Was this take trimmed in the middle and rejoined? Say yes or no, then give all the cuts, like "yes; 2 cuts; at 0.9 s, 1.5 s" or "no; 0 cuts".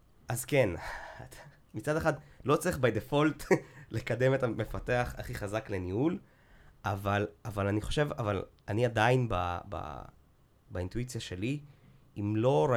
no; 0 cuts